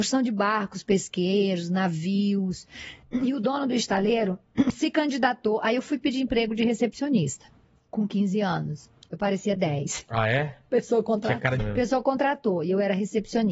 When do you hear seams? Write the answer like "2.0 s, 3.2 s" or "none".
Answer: 3.0 s, 7.6 s, 9.6 s, 11.6 s